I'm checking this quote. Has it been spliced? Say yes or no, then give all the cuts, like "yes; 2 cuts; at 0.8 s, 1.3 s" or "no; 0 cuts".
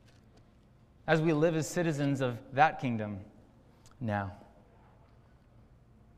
no; 0 cuts